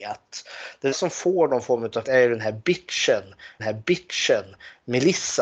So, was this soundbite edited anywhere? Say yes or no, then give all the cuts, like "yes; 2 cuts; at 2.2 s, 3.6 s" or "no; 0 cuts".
yes; 3 cuts; at 0.9 s, 2.0 s, 3.6 s